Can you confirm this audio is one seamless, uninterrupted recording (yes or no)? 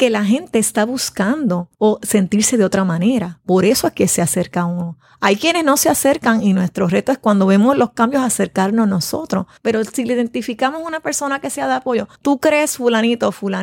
no